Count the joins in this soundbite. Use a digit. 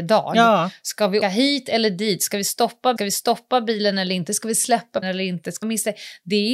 4